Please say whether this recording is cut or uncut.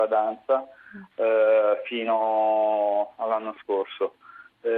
uncut